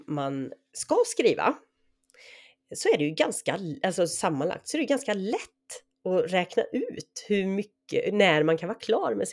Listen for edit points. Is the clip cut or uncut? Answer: uncut